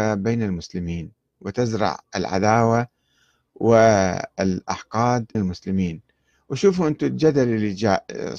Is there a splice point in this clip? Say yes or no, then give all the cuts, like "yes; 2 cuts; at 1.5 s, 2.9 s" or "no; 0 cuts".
yes; 1 cut; at 5.3 s